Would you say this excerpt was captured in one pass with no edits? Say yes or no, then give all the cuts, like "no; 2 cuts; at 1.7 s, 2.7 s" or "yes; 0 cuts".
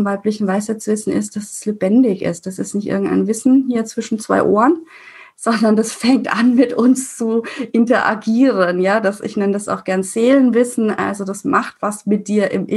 yes; 0 cuts